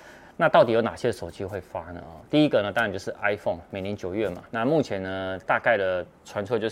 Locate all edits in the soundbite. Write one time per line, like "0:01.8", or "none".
0:04.5